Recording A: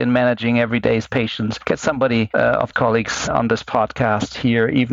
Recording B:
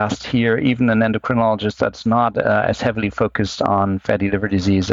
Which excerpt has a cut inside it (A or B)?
A